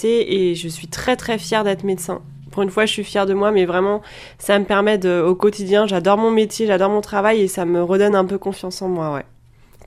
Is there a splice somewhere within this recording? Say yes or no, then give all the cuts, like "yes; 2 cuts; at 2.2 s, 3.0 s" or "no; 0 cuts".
no; 0 cuts